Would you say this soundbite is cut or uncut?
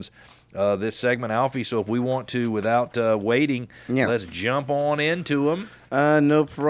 uncut